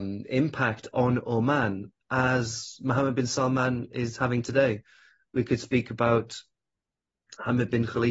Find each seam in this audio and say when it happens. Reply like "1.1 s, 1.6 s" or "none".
2.0 s